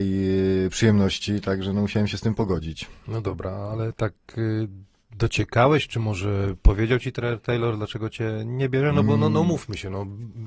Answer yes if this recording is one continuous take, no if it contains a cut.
yes